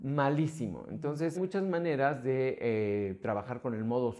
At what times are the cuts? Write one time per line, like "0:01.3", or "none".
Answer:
0:01.3